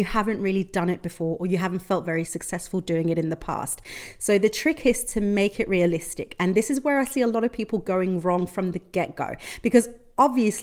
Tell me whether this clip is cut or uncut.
uncut